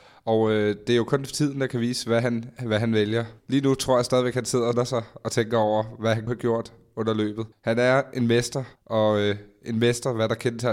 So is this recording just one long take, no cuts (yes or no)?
no